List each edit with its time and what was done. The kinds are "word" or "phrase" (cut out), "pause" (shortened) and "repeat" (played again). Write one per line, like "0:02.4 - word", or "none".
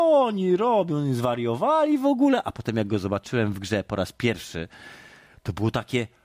none